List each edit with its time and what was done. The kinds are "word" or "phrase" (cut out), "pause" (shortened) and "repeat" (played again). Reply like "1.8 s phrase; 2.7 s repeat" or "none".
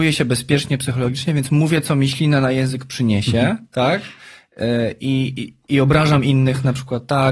none

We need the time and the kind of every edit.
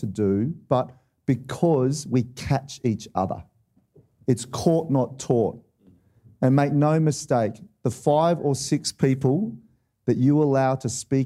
none

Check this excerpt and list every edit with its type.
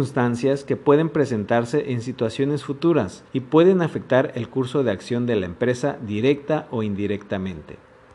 3.3 s pause

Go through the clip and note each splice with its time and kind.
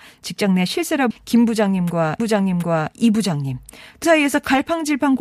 1.1 s word; 2.2 s repeat; 4.0 s word

